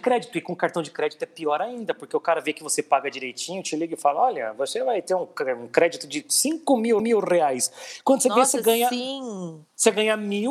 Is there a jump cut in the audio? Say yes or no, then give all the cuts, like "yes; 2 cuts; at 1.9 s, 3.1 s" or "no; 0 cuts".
yes; 1 cut; at 7.0 s